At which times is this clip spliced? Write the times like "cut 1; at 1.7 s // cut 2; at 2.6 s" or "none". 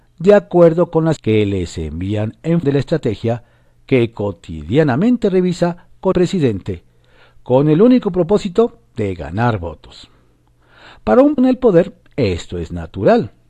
cut 1; at 1.2 s // cut 2; at 2.6 s // cut 3; at 6.1 s // cut 4; at 11.4 s